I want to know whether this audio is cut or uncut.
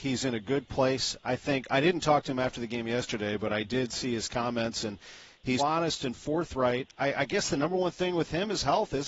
cut